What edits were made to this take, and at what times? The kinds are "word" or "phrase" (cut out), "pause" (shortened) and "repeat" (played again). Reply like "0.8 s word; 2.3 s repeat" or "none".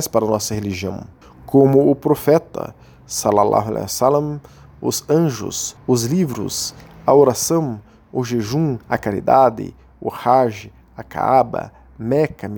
1.2 s pause; 5.8 s pause; 8.8 s pause